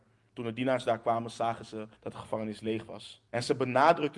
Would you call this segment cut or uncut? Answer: cut